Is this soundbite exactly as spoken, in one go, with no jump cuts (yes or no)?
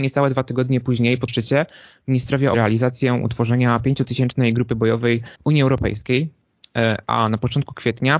no